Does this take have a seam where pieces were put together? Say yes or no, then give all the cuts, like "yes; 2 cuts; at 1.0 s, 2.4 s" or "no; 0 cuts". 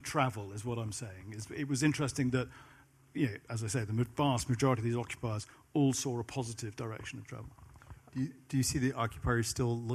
no; 0 cuts